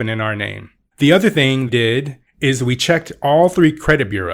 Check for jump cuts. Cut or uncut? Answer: cut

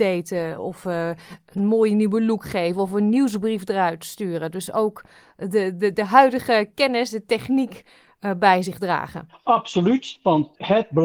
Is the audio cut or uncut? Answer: uncut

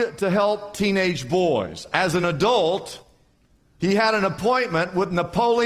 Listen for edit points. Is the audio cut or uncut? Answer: uncut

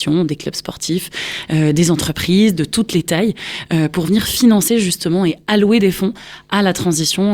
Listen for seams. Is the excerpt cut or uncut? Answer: uncut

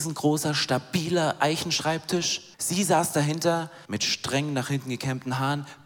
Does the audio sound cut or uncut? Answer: cut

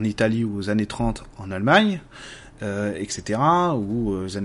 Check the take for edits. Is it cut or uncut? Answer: uncut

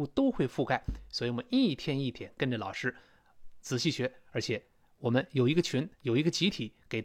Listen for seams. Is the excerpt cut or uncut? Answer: cut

